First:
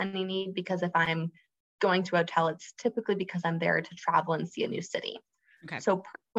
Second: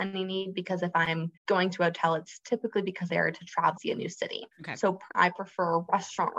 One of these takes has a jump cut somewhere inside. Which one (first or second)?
second